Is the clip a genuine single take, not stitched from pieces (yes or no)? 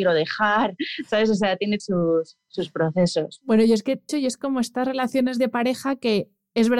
no